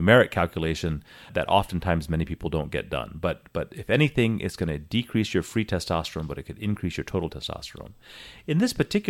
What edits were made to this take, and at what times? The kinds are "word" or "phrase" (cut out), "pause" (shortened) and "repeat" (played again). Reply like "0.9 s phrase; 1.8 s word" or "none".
1.3 s word